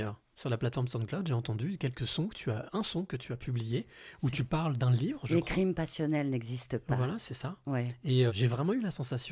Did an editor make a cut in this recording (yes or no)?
yes